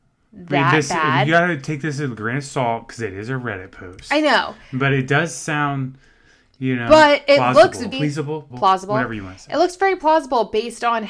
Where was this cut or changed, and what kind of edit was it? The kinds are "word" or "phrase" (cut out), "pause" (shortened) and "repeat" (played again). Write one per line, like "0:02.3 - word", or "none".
0:07.9 - word
0:08.5 - word